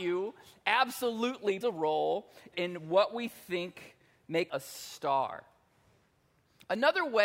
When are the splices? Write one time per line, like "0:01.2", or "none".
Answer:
0:01.6
0:02.5
0:04.5